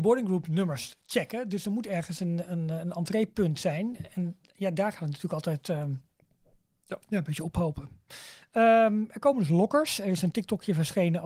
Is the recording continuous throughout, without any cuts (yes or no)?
yes